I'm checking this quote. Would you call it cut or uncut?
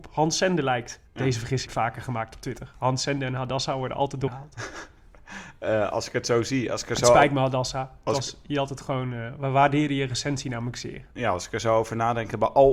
cut